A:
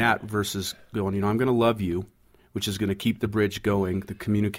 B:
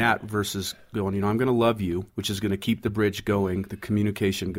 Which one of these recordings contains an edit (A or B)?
B